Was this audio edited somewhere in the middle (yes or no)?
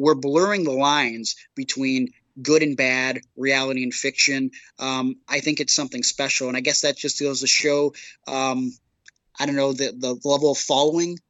no